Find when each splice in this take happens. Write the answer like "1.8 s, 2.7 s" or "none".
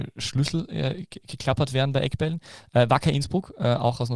none